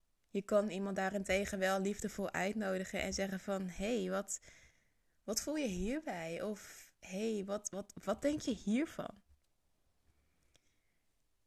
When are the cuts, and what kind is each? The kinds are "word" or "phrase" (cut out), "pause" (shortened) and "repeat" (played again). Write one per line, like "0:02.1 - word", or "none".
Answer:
none